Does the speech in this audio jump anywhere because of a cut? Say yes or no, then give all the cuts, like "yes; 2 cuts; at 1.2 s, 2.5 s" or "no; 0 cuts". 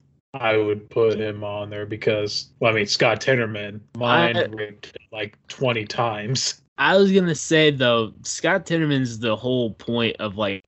yes; 4 cuts; at 2.5 s, 3.9 s, 5.1 s, 6.7 s